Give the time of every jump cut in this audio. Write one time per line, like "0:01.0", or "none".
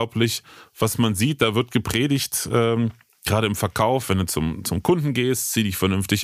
none